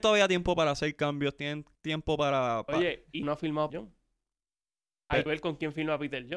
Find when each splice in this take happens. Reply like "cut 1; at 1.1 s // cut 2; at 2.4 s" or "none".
cut 1; at 1.7 s // cut 2; at 3.2 s // cut 3; at 3.7 s // cut 4; at 5.3 s